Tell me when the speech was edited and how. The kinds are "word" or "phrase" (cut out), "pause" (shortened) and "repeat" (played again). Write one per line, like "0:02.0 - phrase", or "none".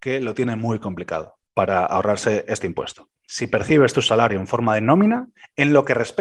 0:01.4 - pause